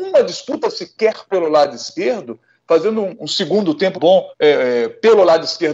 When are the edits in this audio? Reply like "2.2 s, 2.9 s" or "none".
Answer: 3.1 s, 3.9 s, 4.3 s